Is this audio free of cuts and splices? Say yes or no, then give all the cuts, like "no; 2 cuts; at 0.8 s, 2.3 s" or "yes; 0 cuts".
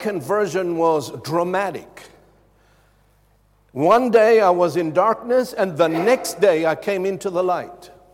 yes; 0 cuts